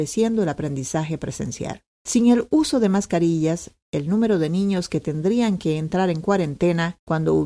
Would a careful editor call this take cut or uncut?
uncut